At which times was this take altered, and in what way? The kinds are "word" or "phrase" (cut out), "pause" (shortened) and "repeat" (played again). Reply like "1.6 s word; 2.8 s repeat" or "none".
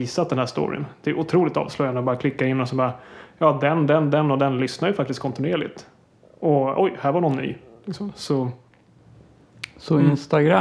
none